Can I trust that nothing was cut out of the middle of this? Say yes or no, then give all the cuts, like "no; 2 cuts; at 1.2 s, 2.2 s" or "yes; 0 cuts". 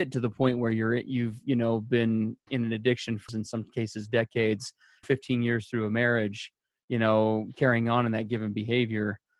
no; 3 cuts; at 2.5 s, 3.3 s, 5.0 s